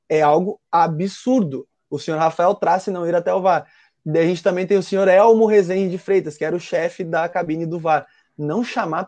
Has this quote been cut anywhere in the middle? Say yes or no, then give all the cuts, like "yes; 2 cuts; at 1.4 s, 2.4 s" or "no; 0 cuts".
no; 0 cuts